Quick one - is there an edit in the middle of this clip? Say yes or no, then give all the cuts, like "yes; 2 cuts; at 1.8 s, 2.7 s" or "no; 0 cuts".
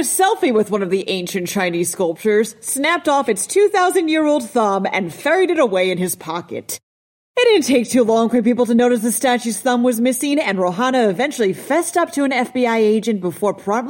no; 0 cuts